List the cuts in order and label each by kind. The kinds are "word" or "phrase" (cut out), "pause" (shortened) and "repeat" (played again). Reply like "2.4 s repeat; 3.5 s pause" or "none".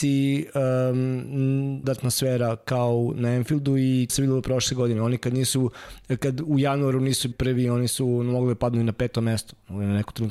1.8 s word; 4.1 s word; 7.3 s word

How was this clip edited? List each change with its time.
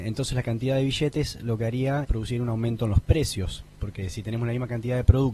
2.0 s word

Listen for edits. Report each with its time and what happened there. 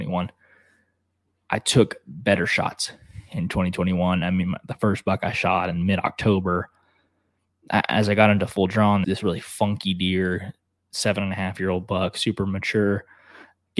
9.0 s word

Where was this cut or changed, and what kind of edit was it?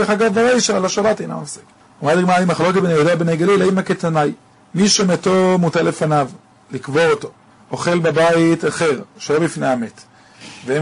none

